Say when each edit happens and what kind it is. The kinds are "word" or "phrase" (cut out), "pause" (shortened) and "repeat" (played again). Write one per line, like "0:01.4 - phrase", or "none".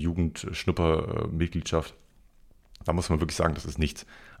none

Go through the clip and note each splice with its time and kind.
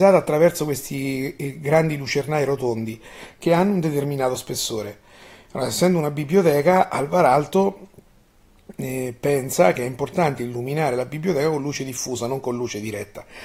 none

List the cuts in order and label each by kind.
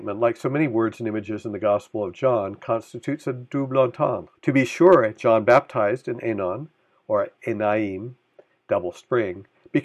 0:04.4 - pause

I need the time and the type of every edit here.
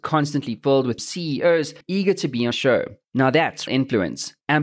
0:01.0 - phrase
0:01.8 - pause
0:02.5 - word
0:03.7 - word

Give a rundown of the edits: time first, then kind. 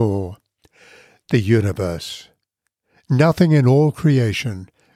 none

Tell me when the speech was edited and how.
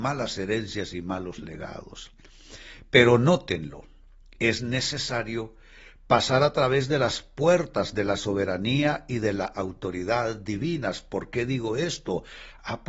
none

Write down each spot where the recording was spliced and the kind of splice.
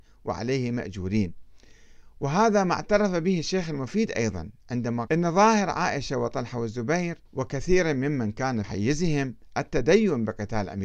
0:05.1 - word
0:07.3 - pause
0:08.6 - word

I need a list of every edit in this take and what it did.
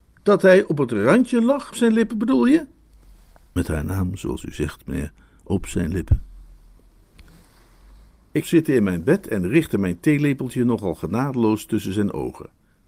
0:01.7 - phrase
0:08.4 - phrase

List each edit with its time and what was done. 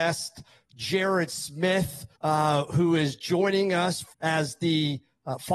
0:02.2 - pause
0:04.1 - pause

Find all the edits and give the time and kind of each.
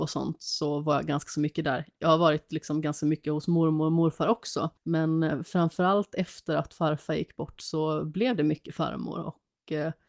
0:04.8 - pause

